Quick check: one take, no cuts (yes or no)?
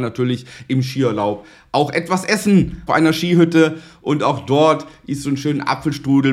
no